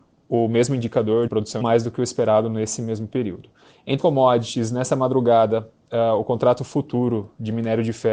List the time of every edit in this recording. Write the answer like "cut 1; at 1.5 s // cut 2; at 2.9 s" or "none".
cut 1; at 1.3 s // cut 2; at 1.6 s // cut 3; at 4.0 s